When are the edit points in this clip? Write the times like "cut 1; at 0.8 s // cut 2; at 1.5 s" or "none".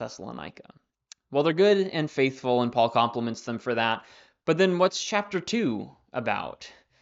cut 1; at 1.1 s